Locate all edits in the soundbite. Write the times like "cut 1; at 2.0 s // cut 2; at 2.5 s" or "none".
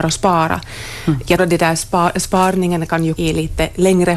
cut 1; at 1.4 s // cut 2; at 3.2 s